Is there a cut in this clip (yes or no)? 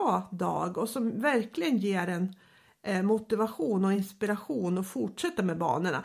no